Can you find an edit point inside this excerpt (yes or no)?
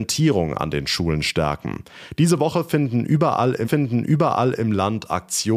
yes